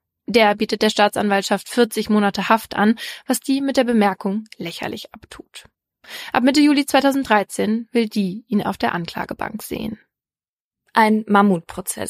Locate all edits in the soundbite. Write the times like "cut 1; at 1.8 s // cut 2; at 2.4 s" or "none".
none